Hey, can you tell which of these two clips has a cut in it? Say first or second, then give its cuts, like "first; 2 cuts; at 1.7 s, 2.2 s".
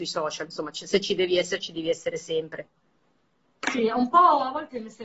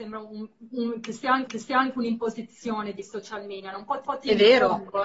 second; 3 cuts; at 1.5 s, 3.0 s, 4.0 s